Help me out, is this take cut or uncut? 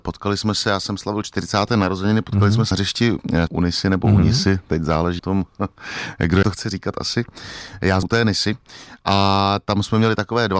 cut